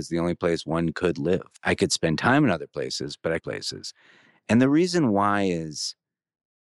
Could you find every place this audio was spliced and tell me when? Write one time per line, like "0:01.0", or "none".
0:03.4